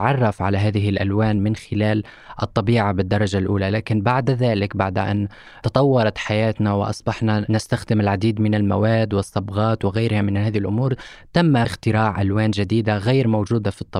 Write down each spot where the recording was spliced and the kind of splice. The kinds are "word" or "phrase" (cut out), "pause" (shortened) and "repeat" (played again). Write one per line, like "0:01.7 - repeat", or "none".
none